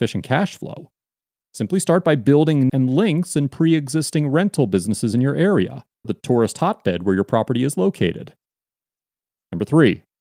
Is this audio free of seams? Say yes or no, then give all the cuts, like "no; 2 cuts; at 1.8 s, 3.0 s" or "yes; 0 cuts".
no; 2 cuts; at 2.7 s, 6.0 s